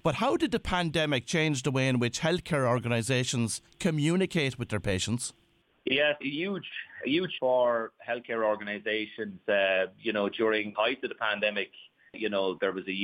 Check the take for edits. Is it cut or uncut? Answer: cut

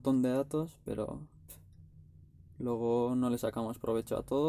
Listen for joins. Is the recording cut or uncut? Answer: uncut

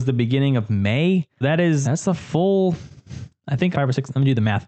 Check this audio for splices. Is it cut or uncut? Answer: cut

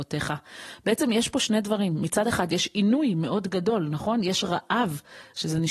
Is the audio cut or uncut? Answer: uncut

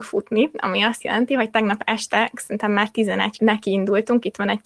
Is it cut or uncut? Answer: cut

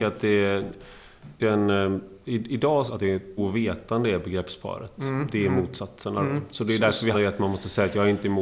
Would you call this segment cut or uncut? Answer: cut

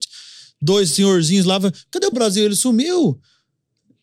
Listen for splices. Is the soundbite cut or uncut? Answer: cut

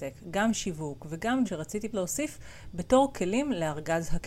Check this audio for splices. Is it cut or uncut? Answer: cut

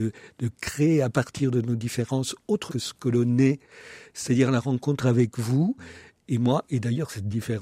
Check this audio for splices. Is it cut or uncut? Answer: cut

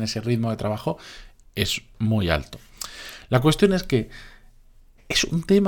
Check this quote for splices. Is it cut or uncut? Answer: uncut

